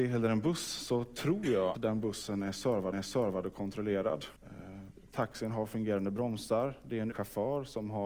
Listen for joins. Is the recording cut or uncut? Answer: cut